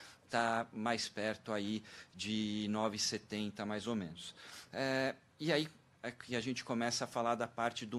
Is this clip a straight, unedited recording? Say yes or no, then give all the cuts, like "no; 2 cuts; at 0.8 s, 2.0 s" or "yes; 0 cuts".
yes; 0 cuts